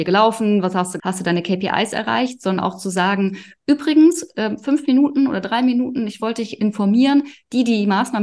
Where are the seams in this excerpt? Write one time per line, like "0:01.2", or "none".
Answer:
0:01.0

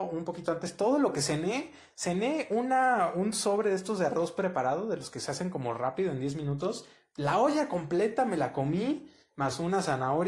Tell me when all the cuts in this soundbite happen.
none

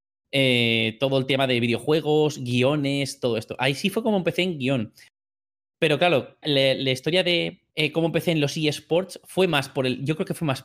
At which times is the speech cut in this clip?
0:06.4
0:07.7

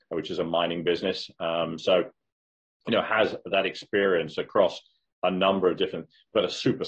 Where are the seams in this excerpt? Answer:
none

